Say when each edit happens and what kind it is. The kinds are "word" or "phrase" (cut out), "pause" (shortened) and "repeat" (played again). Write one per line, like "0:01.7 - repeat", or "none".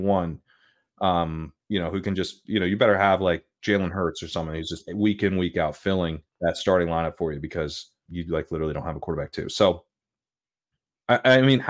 0:01.6 - pause
0:08.1 - word